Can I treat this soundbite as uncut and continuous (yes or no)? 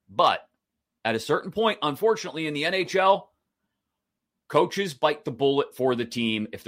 yes